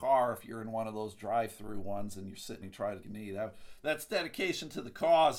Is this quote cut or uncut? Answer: cut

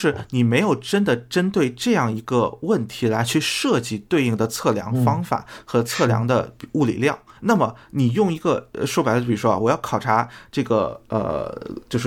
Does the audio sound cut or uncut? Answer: cut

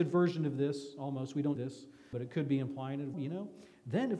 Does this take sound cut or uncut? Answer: cut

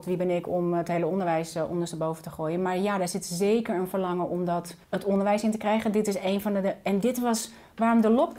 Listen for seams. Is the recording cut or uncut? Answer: cut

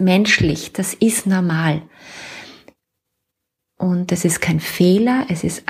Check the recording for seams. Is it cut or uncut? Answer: uncut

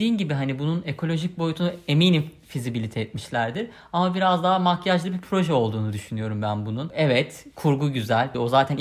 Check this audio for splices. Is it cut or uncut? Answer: uncut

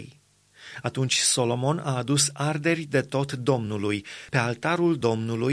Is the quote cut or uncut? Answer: uncut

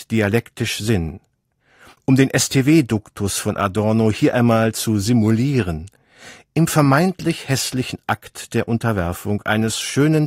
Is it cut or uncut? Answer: uncut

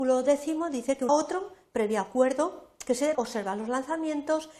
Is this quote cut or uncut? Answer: cut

